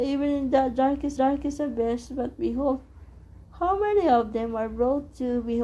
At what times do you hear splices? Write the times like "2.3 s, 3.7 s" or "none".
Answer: 1.2 s